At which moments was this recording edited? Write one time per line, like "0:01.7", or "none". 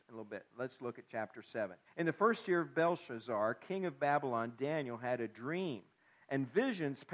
0:01.9